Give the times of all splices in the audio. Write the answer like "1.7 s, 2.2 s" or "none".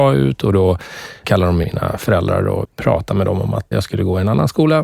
1.2 s, 1.6 s, 2.6 s, 3.7 s